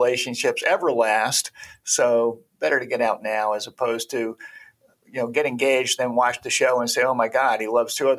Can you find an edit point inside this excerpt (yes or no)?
no